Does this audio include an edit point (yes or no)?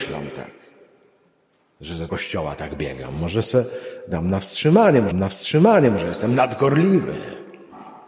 yes